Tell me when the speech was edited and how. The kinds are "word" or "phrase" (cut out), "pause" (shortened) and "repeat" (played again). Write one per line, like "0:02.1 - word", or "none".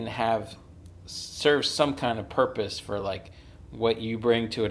none